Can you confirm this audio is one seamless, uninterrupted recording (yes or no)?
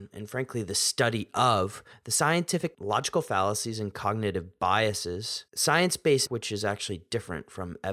no